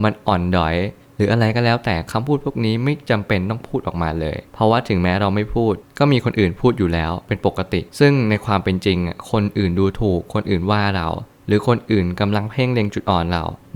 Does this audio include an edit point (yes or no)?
yes